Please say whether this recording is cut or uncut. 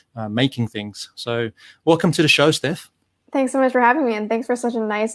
uncut